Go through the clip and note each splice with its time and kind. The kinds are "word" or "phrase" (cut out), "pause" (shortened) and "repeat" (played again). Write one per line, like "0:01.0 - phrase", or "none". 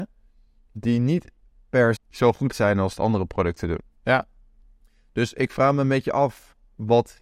0:02.0 - phrase
0:02.5 - word
0:03.0 - phrase